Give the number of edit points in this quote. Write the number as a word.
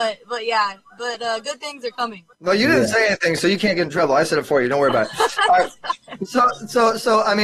one